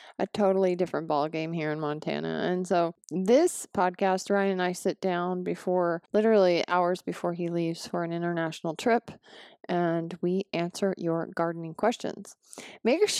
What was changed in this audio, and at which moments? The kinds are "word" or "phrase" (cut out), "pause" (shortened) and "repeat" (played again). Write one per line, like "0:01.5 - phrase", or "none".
0:06.1 - pause